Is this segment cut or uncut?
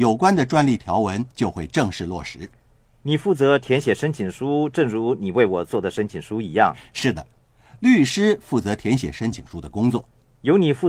cut